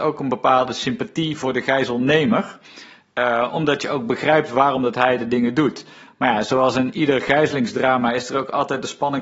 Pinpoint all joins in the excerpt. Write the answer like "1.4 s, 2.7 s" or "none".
none